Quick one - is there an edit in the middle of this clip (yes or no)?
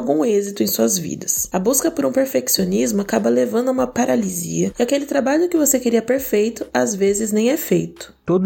no